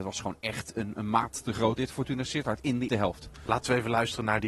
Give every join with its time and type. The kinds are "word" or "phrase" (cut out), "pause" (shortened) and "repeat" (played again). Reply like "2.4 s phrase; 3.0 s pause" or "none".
1.8 s word; 2.9 s word; 3.3 s pause